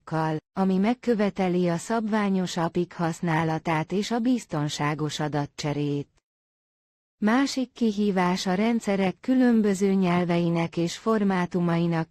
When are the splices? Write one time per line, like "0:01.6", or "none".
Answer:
none